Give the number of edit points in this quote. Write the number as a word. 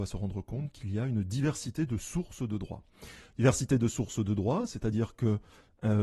zero